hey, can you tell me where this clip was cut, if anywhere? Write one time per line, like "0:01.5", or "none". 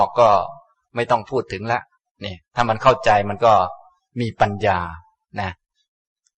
none